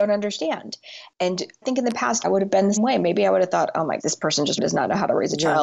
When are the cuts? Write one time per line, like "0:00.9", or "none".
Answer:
0:01.6
0:02.2
0:02.8
0:04.0
0:04.6